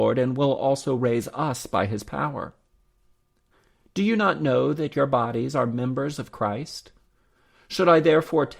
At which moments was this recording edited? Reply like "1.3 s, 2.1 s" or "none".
none